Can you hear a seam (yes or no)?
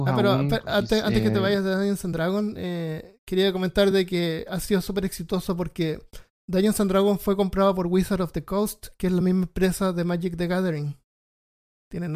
no